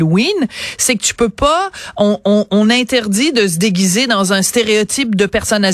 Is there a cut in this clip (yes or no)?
no